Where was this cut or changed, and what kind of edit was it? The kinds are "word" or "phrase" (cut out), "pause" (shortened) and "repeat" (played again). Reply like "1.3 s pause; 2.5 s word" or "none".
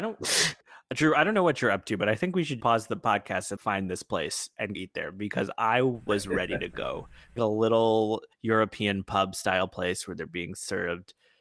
2.6 s word; 3.6 s word; 4.7 s word; 7.4 s word; 8.3 s pause